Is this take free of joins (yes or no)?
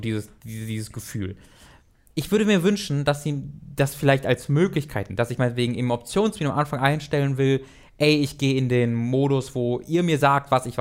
no